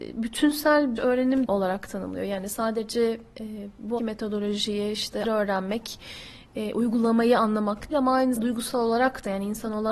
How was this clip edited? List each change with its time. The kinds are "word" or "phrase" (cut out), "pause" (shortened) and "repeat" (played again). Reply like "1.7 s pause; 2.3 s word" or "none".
1.0 s word; 1.4 s word; 4.0 s word; 5.2 s word; 7.9 s word; 8.4 s word